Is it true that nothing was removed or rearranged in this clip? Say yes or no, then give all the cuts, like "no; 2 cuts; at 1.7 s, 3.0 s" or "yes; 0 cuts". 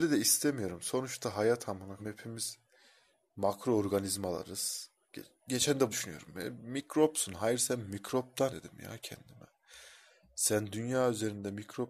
no; 3 cuts; at 2.0 s, 5.9 s, 8.5 s